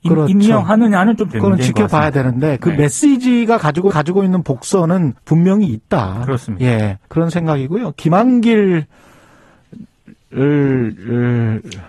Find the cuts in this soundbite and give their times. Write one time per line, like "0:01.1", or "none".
0:01.3
0:03.9
0:05.2
0:07.0